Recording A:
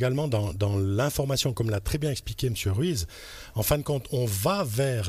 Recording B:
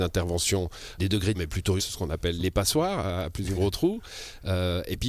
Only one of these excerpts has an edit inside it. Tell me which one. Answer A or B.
B